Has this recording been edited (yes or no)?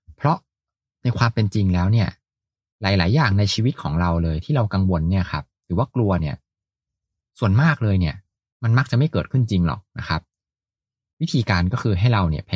no